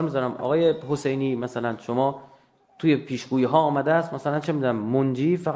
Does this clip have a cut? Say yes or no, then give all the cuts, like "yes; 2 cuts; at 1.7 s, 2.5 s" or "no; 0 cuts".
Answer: no; 0 cuts